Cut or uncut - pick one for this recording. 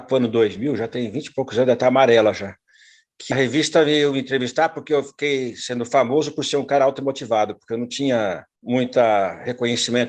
cut